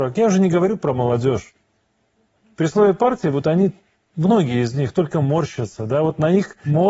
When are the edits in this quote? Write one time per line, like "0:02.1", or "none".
none